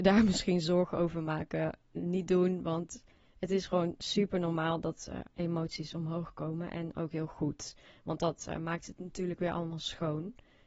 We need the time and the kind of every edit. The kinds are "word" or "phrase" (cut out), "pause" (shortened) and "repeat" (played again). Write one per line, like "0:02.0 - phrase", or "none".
none

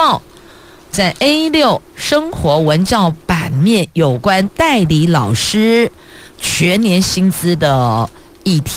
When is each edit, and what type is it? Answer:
0:01.9 - pause

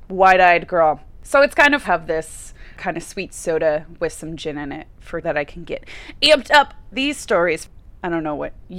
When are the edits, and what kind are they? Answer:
0:01.8 - phrase
0:05.2 - phrase
0:06.9 - word

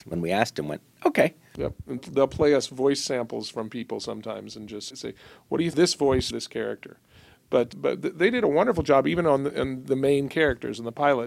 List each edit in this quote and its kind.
0:02.0 - word
0:04.9 - word
0:05.7 - phrase
0:06.3 - phrase
0:07.7 - word

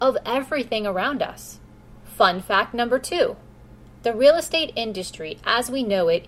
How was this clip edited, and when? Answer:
0:03.9 - pause

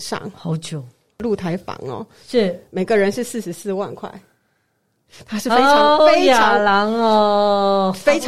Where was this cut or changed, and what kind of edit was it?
0:06.0 - word

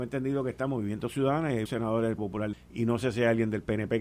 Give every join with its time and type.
0:01.7 - word
0:02.2 - word
0:02.5 - word

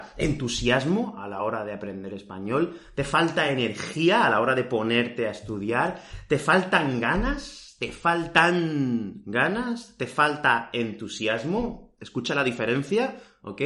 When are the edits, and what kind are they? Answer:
none

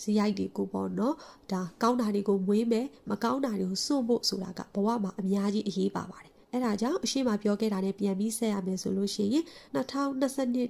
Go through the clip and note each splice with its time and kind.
0:06.4 - pause
0:09.7 - pause

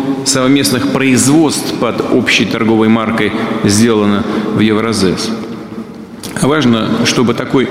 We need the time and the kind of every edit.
none

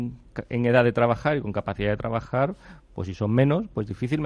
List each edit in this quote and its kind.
none

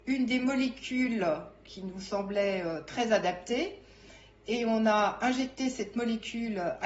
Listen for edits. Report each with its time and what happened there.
none

